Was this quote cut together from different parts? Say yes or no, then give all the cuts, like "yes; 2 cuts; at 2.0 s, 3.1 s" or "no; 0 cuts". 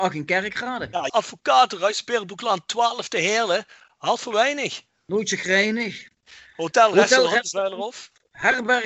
yes; 1 cut; at 1.1 s